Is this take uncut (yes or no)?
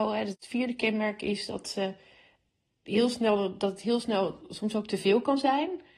yes